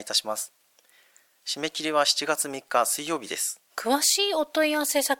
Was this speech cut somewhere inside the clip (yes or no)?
yes